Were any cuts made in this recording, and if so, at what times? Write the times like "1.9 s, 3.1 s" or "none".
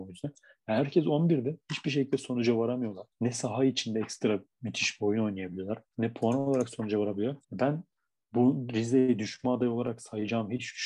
3.1 s, 5.9 s, 7.4 s